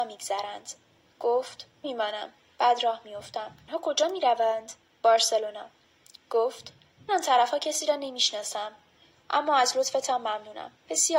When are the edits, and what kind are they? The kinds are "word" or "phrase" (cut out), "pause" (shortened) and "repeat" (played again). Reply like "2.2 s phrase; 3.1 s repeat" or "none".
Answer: 1.8 s word; 3.7 s word; 4.8 s word; 7.1 s word

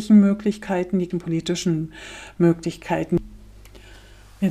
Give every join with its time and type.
1.1 s word

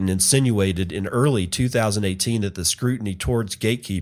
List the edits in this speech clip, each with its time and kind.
none

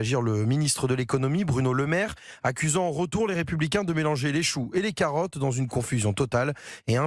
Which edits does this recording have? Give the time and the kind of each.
none

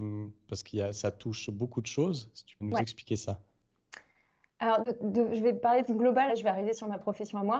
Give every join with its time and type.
2.6 s word; 4.8 s word; 5.9 s word; 6.3 s word

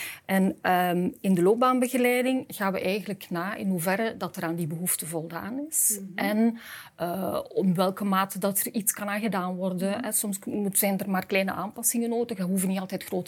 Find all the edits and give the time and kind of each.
none

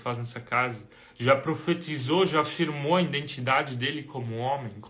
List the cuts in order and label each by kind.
none

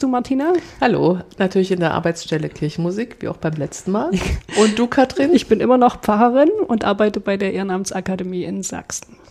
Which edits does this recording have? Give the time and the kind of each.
none

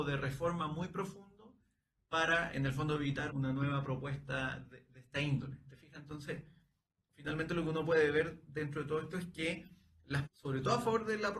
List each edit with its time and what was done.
2.5 s word; 3.3 s word; 9.1 s word; 10.2 s word

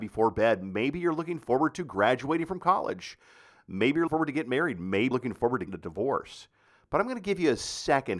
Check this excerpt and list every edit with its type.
4.1 s word; 5.1 s word; 5.7 s word

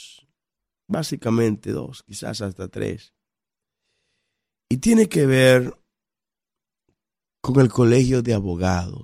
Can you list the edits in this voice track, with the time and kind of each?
none

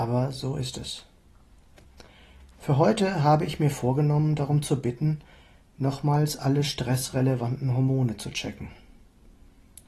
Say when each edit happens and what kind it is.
none

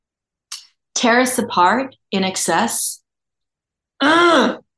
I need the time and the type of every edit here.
none

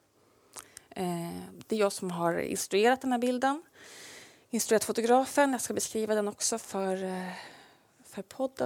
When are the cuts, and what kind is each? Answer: none

